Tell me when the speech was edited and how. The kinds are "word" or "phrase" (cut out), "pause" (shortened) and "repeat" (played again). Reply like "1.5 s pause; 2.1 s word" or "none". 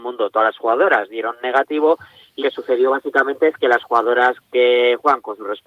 2.4 s word